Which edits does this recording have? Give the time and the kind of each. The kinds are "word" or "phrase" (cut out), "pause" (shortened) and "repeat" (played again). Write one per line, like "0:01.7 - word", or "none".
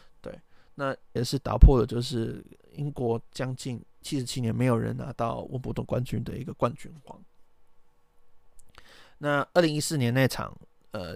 0:01.2 - word